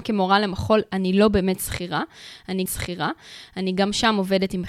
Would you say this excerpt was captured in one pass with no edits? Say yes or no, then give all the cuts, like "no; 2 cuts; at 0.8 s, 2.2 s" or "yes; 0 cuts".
no; 1 cut; at 2.7 s